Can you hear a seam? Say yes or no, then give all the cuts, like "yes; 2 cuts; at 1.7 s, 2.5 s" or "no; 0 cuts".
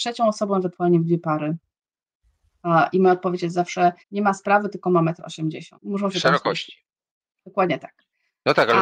yes; 4 cuts; at 4.0 s, 4.8 s, 5.7 s, 7.4 s